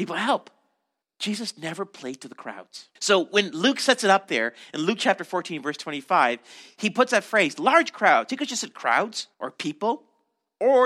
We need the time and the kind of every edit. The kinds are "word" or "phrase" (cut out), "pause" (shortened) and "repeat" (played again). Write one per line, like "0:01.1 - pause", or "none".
0:01.0 - pause
0:03.0 - pause
0:09.3 - pause